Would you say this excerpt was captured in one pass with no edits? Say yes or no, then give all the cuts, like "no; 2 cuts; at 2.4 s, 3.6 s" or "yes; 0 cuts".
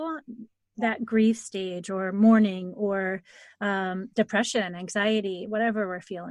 yes; 0 cuts